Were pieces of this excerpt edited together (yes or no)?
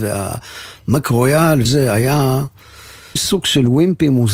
yes